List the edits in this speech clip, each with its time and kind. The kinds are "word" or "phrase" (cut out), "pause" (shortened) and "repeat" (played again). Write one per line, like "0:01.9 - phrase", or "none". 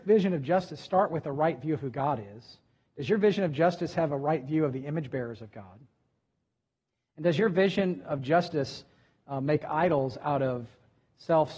none